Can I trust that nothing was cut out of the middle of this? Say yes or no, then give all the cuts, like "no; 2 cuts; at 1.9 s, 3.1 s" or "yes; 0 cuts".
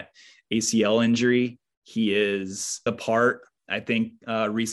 no; 1 cut; at 2.9 s